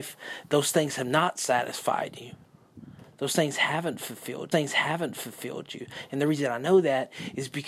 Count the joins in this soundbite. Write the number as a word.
one